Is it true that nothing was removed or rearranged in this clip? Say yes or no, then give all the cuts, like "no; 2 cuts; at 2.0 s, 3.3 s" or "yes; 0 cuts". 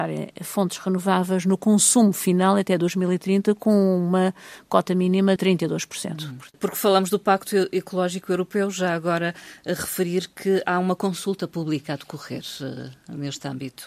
no; 1 cut; at 5.4 s